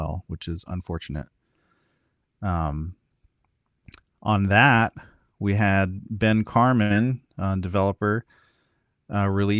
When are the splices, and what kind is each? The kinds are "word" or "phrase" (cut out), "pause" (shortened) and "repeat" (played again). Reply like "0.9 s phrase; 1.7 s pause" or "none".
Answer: none